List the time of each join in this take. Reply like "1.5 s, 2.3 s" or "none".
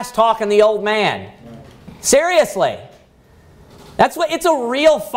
none